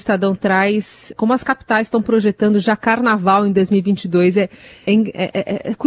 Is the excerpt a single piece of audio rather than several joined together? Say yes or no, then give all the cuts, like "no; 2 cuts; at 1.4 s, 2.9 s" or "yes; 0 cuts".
no; 2 cuts; at 1.1 s, 4.9 s